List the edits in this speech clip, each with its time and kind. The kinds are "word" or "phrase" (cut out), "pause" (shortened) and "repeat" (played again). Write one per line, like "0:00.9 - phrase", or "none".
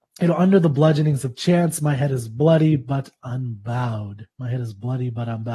0:04.3 - pause